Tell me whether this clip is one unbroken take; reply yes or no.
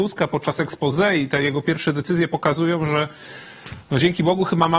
yes